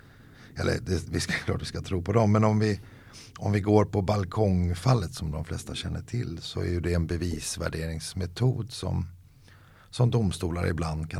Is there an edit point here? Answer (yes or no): no